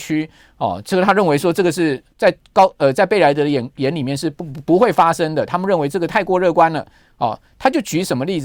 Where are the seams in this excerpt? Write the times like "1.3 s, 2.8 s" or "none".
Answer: 2.1 s